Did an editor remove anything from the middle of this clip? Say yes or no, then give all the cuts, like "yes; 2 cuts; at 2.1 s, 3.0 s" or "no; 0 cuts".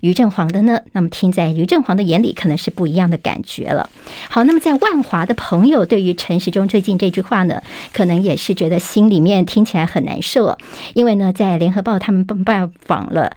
no; 0 cuts